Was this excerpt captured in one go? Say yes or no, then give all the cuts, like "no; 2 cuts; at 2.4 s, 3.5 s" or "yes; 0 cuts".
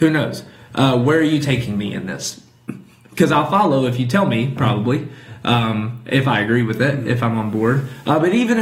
yes; 0 cuts